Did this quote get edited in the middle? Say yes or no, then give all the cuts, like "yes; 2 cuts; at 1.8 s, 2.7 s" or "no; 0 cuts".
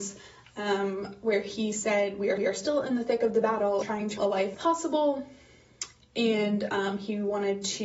yes; 4 cuts; at 2.4 s, 3.8 s, 4.2 s, 4.5 s